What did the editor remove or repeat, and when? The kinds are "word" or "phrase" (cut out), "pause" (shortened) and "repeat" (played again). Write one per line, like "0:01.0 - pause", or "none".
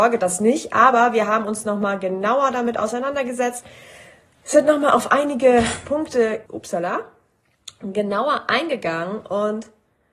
0:06.5 - pause